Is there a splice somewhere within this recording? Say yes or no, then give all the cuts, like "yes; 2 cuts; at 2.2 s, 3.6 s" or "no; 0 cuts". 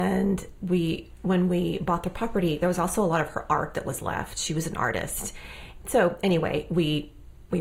yes; 1 cut; at 2.6 s